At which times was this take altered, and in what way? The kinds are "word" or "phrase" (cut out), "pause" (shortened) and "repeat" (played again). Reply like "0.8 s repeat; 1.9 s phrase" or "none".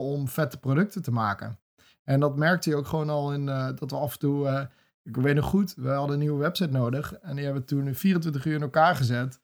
none

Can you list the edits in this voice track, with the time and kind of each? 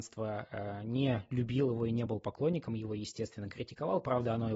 none

